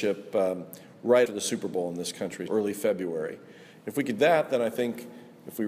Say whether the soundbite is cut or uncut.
cut